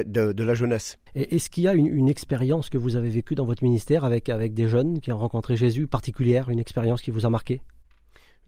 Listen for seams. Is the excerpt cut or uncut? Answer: cut